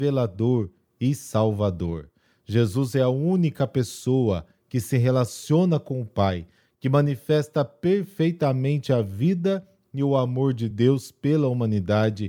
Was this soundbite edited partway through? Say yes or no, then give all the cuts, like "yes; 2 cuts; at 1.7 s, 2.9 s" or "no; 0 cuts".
no; 0 cuts